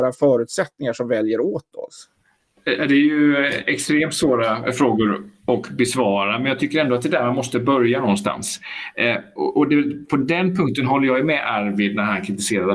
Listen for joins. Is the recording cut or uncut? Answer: uncut